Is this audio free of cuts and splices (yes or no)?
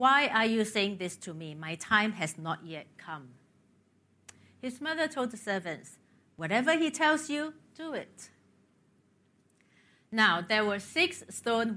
yes